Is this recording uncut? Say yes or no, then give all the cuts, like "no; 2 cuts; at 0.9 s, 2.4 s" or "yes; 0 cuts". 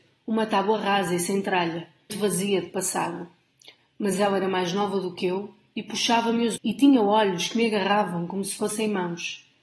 no; 2 cuts; at 2.1 s, 6.6 s